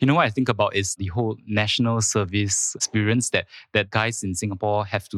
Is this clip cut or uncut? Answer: uncut